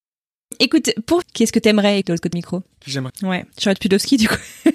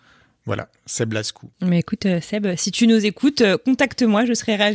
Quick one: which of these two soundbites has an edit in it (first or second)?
first